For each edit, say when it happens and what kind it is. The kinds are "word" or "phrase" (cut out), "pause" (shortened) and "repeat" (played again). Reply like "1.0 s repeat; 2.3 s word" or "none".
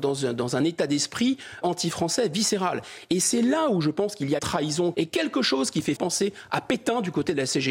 1.6 s word; 4.4 s word; 4.9 s phrase; 5.9 s word